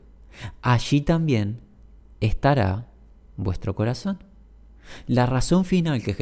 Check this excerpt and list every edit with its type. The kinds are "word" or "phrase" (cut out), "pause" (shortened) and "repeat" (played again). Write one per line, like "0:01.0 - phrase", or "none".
none